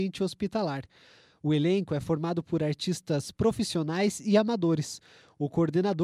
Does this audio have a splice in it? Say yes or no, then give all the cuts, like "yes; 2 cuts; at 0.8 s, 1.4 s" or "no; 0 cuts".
no; 0 cuts